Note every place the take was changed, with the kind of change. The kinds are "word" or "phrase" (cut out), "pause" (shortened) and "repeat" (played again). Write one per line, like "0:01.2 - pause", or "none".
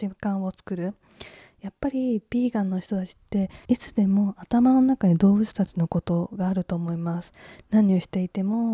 0:03.6 - pause